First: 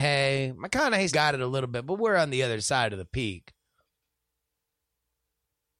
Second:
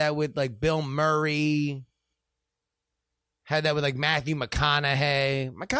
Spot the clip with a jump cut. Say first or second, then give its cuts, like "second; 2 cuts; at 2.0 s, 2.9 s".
first; 1 cut; at 1.1 s